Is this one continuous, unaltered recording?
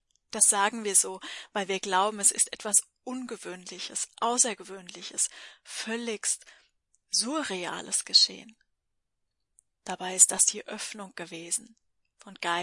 yes; 0 cuts

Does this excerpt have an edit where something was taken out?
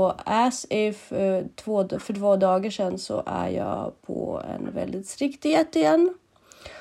no; 0 cuts

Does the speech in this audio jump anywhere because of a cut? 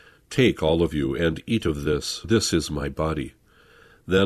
yes; 1 cut; at 2.2 s

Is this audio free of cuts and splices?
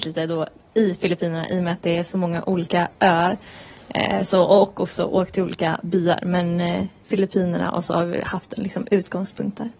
yes; 0 cuts

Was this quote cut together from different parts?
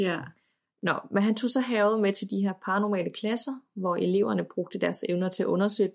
no; 0 cuts

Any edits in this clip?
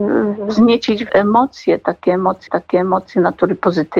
yes; 2 cuts; at 1.1 s, 2.5 s

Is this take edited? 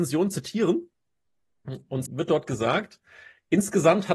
yes; 1 cut; at 2.1 s

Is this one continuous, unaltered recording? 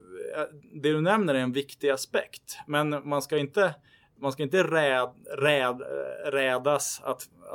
yes; 0 cuts

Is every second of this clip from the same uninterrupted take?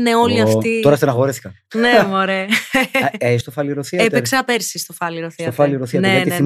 no; 1 cut; at 3.4 s

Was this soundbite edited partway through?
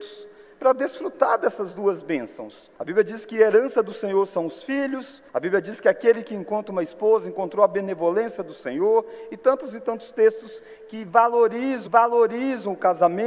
yes; 3 cuts; at 2.8 s, 5.3 s, 11.9 s

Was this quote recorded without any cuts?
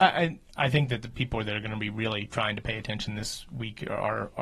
yes; 0 cuts

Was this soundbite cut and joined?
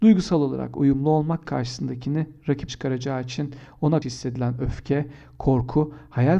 yes; 3 cuts; at 1.4 s, 2.7 s, 4.0 s

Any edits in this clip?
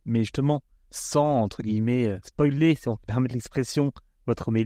no; 0 cuts

